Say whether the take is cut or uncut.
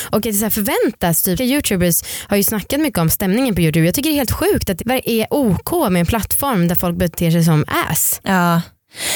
cut